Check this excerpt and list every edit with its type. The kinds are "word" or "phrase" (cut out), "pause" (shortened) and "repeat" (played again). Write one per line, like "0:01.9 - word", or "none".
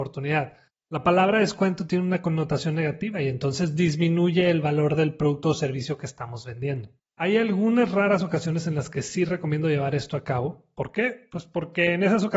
0:07.0 - pause